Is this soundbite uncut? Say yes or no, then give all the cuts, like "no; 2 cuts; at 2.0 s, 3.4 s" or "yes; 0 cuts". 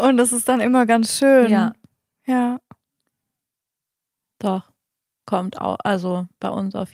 yes; 0 cuts